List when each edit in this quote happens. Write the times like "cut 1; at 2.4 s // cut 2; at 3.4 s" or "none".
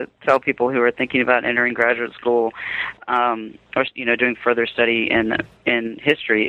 none